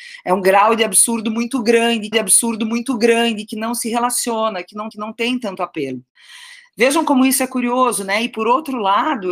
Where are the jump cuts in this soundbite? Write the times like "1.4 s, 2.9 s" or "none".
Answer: 2.1 s, 4.9 s